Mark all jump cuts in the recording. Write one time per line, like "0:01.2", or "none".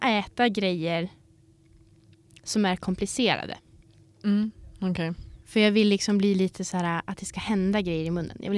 0:04.0
0:05.4